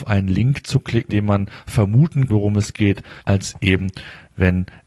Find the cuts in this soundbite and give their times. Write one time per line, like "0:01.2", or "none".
0:01.1
0:02.3
0:03.2